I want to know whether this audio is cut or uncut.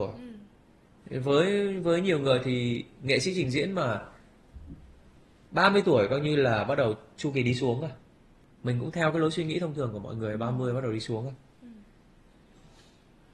uncut